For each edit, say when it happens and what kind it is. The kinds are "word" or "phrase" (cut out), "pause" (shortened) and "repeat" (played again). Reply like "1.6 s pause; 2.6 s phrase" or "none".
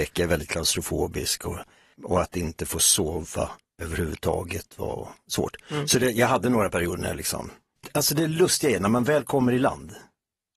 none